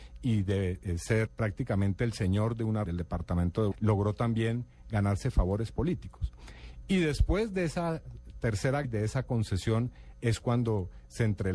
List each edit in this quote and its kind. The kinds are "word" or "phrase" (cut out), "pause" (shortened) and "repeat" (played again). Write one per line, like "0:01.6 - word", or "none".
0:01.3 - word
0:02.9 - word
0:03.7 - word
0:08.8 - word